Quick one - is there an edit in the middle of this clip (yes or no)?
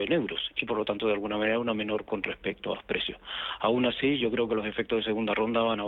yes